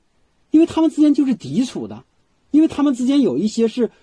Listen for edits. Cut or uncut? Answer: uncut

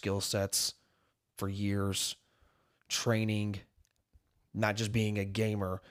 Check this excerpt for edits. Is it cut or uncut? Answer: uncut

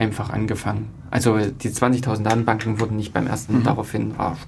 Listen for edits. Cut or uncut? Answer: cut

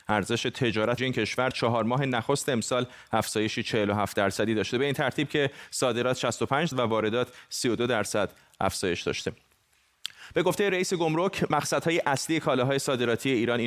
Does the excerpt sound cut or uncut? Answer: cut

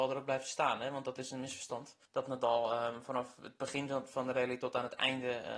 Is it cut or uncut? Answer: cut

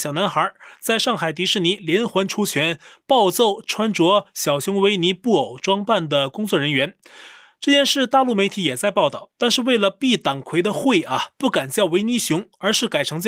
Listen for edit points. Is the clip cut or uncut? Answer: uncut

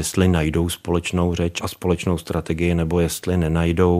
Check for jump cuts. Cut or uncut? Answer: uncut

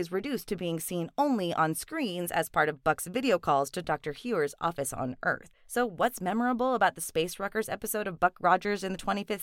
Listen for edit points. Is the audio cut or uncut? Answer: cut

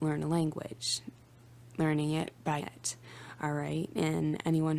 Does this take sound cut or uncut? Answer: cut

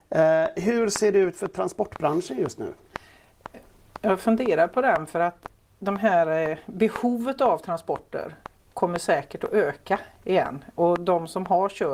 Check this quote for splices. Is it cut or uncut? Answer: uncut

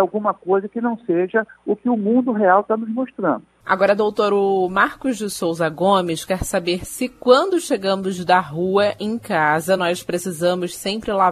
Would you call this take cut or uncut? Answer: uncut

